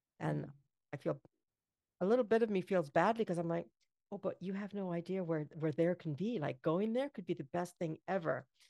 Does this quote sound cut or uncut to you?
uncut